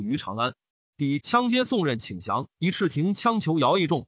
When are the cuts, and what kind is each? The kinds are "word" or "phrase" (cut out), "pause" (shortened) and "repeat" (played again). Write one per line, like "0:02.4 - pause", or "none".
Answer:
0:02.5 - pause